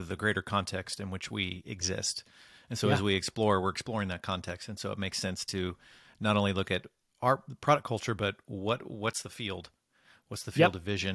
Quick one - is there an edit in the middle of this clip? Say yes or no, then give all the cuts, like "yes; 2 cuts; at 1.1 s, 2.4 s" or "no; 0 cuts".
no; 0 cuts